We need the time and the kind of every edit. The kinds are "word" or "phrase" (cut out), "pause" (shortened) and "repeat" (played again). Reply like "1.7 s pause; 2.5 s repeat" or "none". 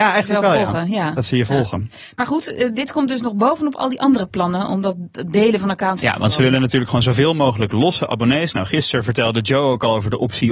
none